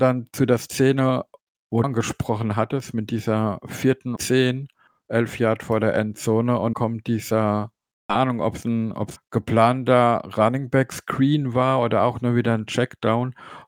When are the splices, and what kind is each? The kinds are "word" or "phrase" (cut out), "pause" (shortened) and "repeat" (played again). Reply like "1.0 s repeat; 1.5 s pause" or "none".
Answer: 1.8 s word; 4.2 s word; 6.7 s word; 9.2 s word